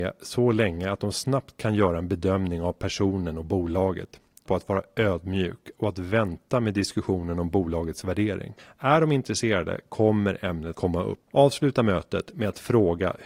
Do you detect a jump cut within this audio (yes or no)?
yes